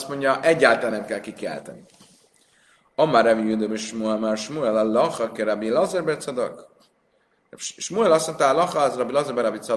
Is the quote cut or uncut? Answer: uncut